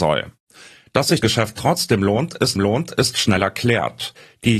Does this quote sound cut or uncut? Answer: cut